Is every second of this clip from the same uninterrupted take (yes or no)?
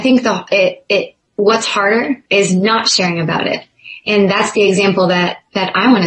no